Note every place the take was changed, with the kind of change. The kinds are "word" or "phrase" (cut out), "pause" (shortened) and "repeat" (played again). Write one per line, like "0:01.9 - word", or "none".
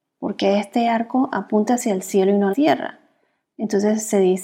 0:02.5 - word